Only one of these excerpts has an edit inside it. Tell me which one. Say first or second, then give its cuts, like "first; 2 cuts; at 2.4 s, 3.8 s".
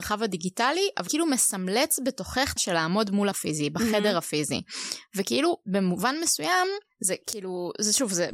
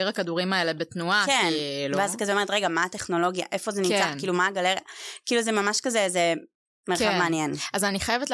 first; 3 cuts; at 1.1 s, 2.6 s, 3.3 s